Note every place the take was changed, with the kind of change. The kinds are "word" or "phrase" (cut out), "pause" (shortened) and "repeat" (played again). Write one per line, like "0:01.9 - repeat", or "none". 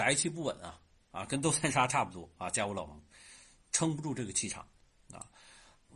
none